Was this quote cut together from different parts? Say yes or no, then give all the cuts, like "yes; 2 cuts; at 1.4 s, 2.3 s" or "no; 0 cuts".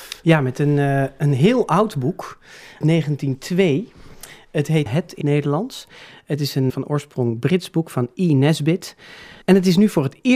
yes; 5 cuts; at 2.8 s, 4.9 s, 5.2 s, 6.7 s, 9.4 s